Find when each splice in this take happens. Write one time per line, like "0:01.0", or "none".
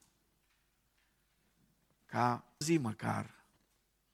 0:02.6